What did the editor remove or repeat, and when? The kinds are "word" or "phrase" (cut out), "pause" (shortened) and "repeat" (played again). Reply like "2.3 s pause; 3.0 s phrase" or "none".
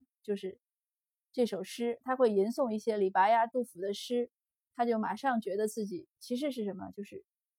none